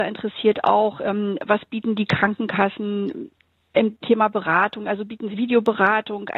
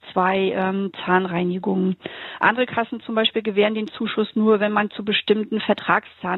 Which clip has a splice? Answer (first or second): first